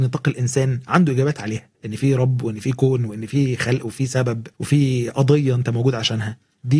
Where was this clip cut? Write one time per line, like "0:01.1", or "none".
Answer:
0:01.7
0:04.5